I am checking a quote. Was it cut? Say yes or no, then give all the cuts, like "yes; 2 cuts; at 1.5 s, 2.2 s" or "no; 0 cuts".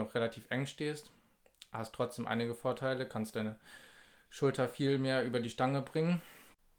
no; 0 cuts